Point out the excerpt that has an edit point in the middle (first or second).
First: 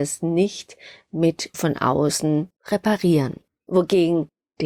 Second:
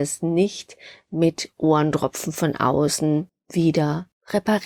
first